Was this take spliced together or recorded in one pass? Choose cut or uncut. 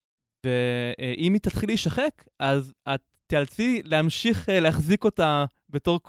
uncut